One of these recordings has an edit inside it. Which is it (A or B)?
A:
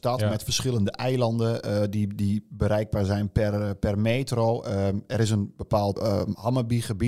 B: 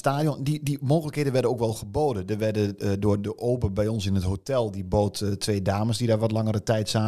A